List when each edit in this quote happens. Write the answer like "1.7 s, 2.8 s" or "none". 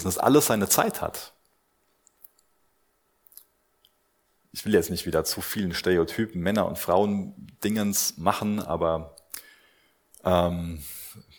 none